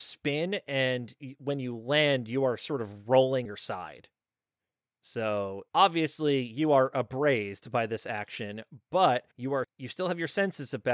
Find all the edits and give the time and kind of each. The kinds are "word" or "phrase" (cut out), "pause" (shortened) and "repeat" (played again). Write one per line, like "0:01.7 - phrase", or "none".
0:03.5 - word
0:05.7 - pause
0:09.3 - pause
0:09.6 - word